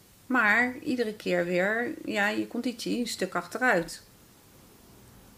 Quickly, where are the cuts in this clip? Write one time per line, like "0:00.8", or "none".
none